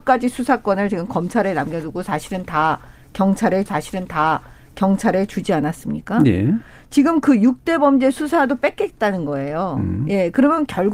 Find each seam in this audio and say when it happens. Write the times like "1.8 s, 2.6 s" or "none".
3.7 s